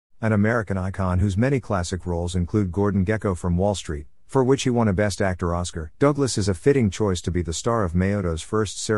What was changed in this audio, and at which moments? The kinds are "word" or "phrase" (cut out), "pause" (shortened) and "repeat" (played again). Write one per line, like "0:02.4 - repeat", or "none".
0:05.9 - pause